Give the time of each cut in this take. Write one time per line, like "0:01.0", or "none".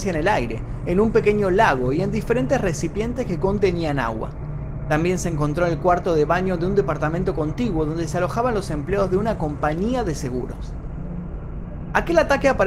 none